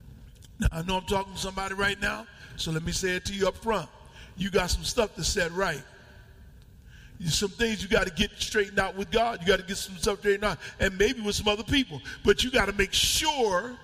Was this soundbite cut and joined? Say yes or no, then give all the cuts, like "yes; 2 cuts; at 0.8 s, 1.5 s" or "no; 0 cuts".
no; 0 cuts